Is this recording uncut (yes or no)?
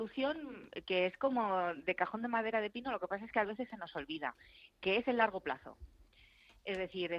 yes